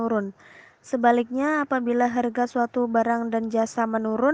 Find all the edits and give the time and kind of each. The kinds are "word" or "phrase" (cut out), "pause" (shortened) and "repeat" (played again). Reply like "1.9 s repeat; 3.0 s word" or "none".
none